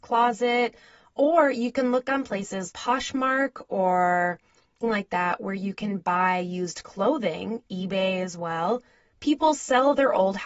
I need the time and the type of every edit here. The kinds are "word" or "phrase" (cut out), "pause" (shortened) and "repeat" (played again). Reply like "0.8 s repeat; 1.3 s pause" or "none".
2.7 s word; 4.8 s phrase